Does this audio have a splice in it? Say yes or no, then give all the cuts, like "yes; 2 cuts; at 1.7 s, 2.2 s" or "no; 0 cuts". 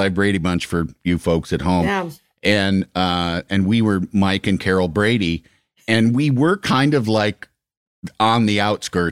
no; 0 cuts